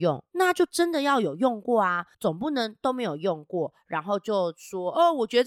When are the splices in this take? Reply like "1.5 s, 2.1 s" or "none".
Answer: 2.1 s